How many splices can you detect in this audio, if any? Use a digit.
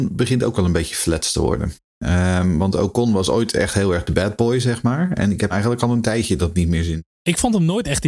1